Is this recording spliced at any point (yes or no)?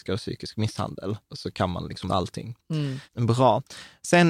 yes